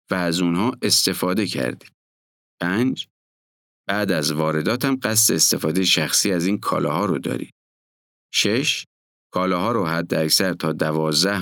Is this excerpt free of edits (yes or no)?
yes